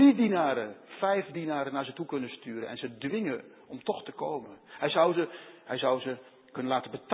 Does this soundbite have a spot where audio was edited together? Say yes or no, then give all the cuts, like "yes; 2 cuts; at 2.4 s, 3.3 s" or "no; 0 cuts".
no; 0 cuts